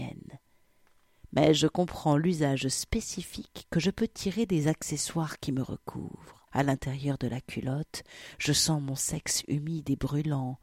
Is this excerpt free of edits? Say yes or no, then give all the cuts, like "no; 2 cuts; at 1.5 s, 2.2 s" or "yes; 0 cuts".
no; 1 cut; at 6.5 s